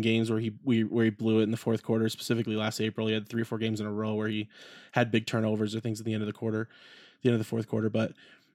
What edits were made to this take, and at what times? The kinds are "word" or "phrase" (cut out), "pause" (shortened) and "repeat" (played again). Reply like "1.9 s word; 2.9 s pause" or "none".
none